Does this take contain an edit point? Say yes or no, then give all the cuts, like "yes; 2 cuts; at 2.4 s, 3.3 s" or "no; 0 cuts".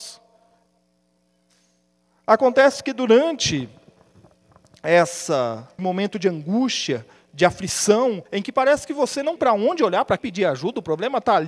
yes; 4 cuts; at 5.8 s, 8.3 s, 9.4 s, 10.2 s